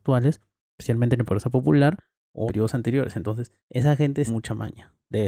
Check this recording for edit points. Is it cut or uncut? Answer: cut